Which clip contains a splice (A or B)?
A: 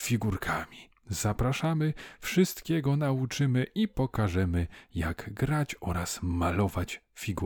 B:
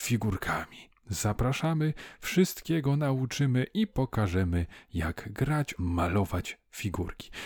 B